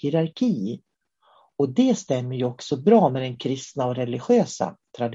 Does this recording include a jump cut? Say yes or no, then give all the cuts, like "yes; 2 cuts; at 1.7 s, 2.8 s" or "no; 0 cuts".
no; 0 cuts